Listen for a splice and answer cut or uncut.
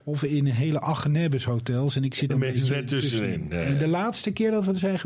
cut